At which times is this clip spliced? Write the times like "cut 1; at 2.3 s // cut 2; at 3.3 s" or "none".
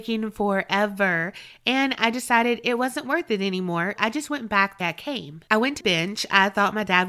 cut 1; at 4.0 s // cut 2; at 4.8 s // cut 3; at 5.8 s